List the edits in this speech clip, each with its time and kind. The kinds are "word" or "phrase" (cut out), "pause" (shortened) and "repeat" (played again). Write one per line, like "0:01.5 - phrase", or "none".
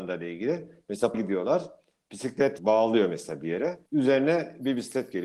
0:01.1 - word
0:02.6 - word
0:03.9 - pause